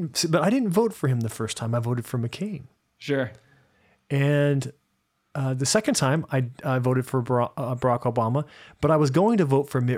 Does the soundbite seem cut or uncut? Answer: uncut